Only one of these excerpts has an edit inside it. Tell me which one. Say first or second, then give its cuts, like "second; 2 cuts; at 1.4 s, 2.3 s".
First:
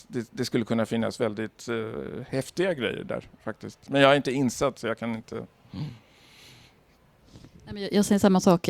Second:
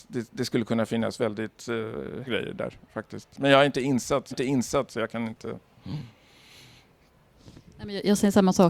second; 2 cuts; at 2.2 s, 4.3 s